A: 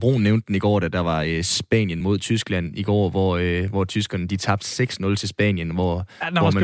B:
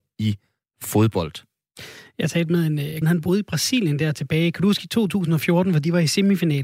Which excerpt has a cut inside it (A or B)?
B